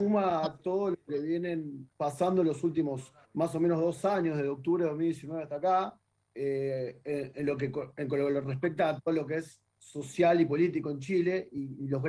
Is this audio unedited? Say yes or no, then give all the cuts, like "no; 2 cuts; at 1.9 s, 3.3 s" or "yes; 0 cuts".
no; 4 cuts; at 1.9 s, 3.2 s, 6.0 s, 9.7 s